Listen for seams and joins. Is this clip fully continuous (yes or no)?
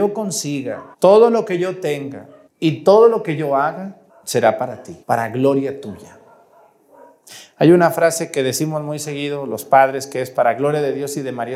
no